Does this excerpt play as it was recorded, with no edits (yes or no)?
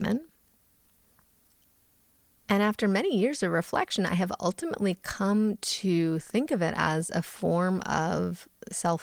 yes